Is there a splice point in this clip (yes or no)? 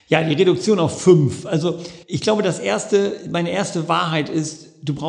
yes